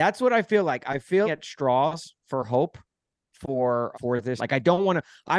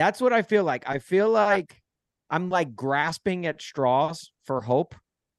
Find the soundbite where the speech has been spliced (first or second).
first